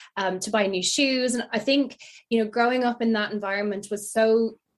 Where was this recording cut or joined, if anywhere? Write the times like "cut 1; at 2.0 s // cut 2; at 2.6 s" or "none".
none